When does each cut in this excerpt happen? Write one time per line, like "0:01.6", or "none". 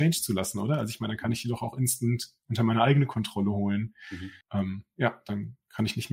0:04.4

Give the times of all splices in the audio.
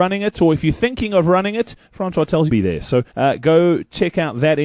0:01.8
0:02.5
0:03.1

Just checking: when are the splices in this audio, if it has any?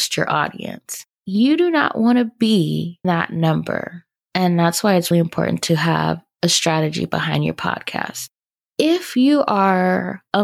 0:01.1
0:03.0
0:05.1

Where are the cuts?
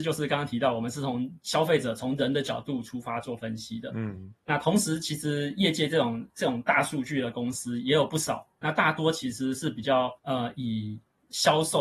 0:10.2

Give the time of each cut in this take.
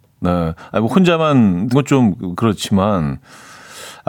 0:01.7

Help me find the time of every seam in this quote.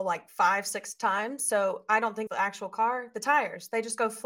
0:02.3

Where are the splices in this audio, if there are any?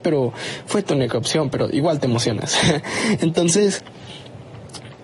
none

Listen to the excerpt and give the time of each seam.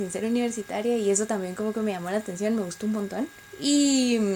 none

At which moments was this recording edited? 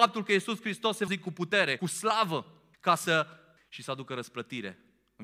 0:01.1
0:01.8
0:02.7
0:03.6

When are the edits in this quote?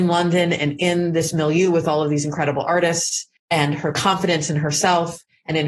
0:03.4

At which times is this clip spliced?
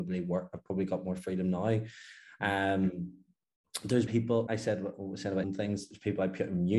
0:04.1
0:04.5
0:05.4

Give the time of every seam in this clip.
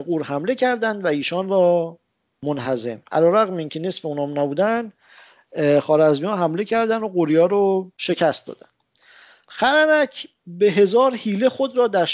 0:07.9

